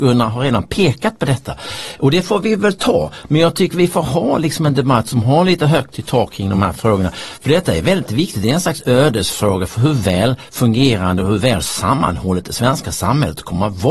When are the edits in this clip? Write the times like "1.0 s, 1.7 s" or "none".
none